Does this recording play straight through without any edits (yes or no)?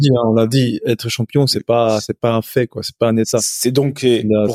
yes